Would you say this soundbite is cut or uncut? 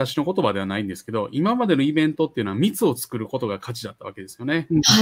uncut